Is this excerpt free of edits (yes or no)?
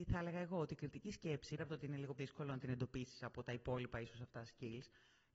no